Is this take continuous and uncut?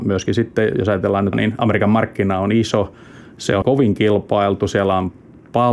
no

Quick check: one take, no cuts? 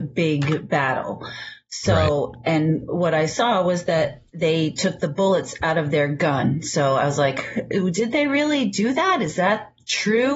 no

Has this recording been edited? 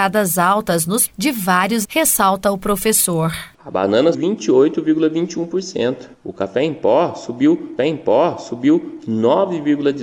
yes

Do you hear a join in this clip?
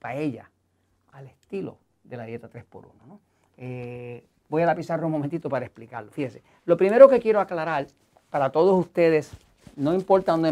no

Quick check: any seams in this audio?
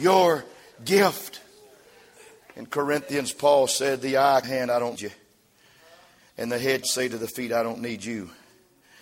yes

